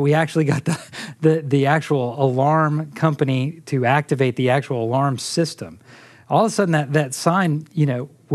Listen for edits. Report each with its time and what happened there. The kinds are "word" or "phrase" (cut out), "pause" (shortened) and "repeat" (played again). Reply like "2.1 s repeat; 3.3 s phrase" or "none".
none